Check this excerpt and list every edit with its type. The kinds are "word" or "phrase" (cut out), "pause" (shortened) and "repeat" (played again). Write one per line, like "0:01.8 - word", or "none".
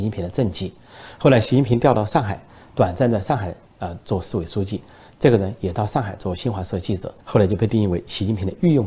0:07.2 - pause